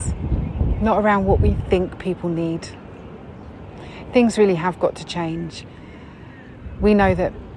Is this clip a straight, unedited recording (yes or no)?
yes